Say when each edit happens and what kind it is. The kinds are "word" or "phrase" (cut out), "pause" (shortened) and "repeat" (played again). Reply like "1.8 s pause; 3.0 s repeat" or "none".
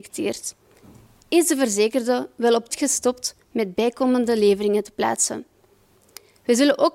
2.7 s word